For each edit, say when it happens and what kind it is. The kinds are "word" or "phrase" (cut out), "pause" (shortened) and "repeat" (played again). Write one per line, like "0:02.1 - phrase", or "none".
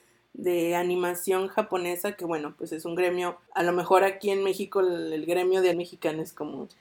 0:03.5 - pause
0:05.7 - word